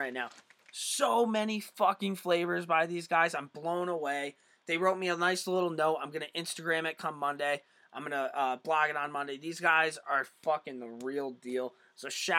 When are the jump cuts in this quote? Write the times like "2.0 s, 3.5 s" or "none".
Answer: none